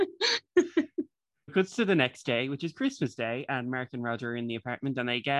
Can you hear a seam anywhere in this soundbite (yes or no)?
yes